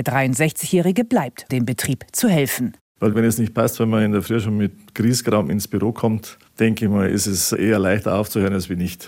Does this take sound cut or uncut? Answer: cut